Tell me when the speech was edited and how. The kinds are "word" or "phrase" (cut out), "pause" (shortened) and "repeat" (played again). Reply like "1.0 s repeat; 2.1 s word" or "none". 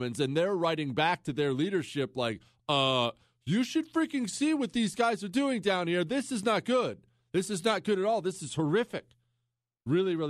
none